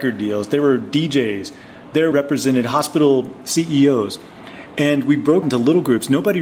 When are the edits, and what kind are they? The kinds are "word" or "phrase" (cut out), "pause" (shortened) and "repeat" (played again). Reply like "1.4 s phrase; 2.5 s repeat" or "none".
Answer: 2.1 s phrase; 5.4 s word